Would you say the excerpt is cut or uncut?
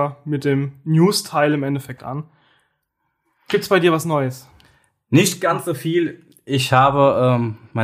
uncut